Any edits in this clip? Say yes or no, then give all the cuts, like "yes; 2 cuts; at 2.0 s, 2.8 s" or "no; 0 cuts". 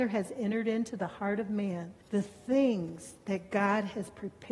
yes; 1 cut; at 2.0 s